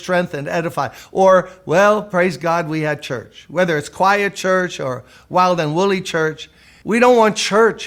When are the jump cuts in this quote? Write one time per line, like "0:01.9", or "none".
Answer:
none